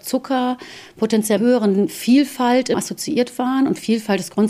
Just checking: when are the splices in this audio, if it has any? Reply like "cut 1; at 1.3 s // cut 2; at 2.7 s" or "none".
cut 1; at 1.4 s // cut 2; at 2.7 s